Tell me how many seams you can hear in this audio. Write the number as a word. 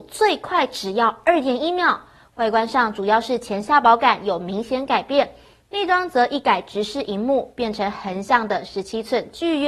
zero